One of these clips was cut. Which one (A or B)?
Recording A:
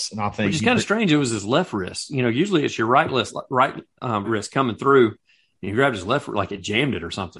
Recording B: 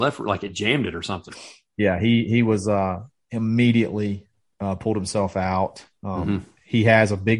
A